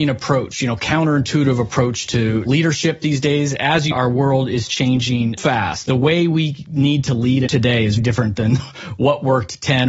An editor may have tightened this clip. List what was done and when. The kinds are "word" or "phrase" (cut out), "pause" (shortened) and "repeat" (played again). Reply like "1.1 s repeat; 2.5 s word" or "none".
3.9 s word; 5.4 s word; 7.5 s word; 8.0 s word